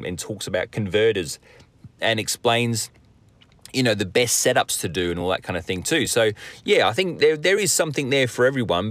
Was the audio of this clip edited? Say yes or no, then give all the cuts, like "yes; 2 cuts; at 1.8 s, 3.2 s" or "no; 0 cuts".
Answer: no; 0 cuts